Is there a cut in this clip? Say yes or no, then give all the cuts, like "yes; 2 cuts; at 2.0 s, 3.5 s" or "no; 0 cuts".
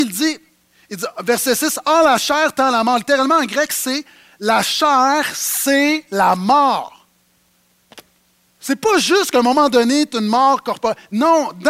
no; 0 cuts